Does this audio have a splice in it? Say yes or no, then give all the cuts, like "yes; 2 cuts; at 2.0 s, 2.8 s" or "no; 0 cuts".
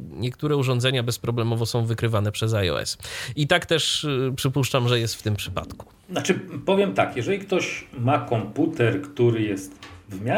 no; 0 cuts